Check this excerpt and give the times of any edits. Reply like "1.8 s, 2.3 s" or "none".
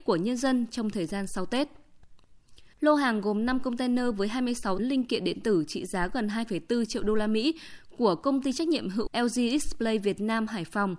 2.7 s, 4.8 s, 9.1 s